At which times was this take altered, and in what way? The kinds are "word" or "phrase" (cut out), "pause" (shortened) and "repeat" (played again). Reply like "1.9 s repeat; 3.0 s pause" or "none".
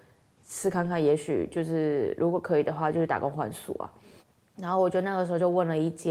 4.2 s pause